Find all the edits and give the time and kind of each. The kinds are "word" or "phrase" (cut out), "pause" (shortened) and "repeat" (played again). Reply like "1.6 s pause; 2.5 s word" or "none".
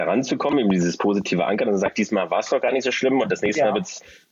none